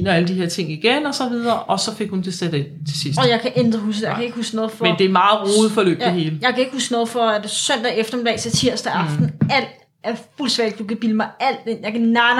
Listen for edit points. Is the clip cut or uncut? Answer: uncut